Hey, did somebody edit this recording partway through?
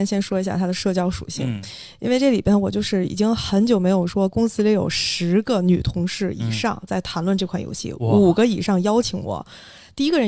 no; 0 cuts

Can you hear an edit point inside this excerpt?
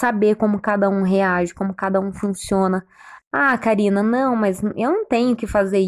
no; 0 cuts

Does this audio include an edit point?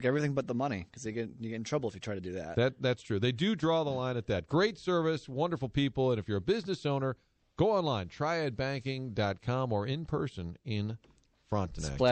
no; 0 cuts

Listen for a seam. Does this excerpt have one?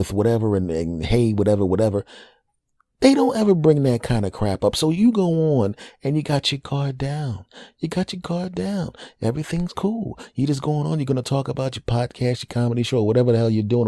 no; 0 cuts

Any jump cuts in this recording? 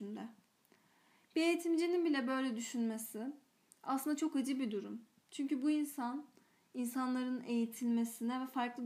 no; 0 cuts

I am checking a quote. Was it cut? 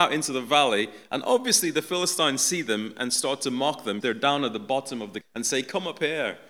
yes; 2 cuts; at 4.0 s, 5.2 s

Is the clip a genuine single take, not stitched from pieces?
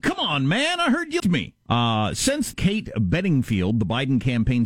no; 3 cuts; at 1.2 s, 1.6 s, 2.5 s

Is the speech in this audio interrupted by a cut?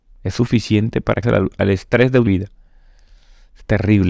yes; 2 cuts; at 1.2 s, 2.3 s

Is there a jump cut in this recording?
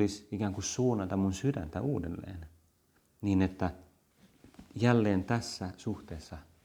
no; 0 cuts

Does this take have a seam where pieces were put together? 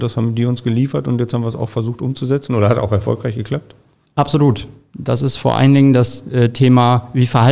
yes; 1 cut; at 4.1 s

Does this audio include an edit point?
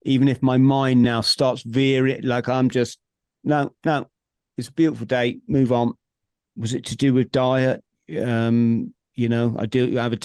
no; 0 cuts

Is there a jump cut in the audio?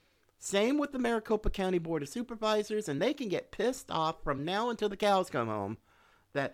no; 0 cuts

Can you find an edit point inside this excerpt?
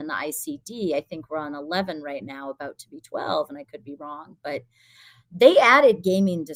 no; 0 cuts

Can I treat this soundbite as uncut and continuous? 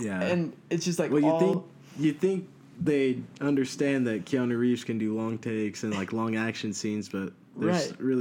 yes; 0 cuts

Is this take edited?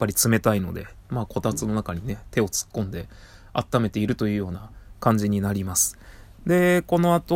no; 0 cuts

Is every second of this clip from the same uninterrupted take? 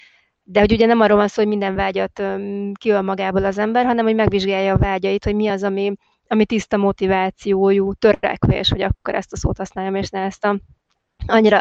yes; 0 cuts

